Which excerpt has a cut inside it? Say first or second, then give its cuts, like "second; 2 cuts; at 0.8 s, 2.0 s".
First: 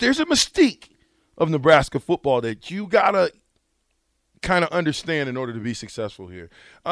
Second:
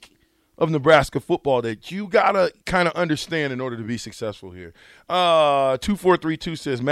second; 1 cut; at 2.6 s